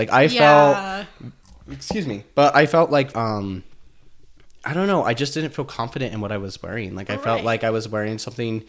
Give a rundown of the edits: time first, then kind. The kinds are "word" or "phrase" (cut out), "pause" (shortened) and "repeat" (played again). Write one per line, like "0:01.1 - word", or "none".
0:01.4 - pause
0:03.1 - word